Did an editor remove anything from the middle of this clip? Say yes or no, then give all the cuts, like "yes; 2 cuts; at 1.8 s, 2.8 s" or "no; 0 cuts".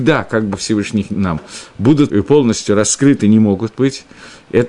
yes; 2 cuts; at 1.1 s, 2.1 s